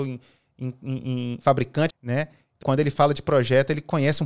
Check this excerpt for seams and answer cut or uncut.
cut